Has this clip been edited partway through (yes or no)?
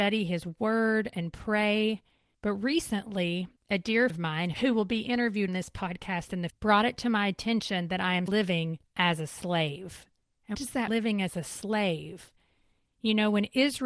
yes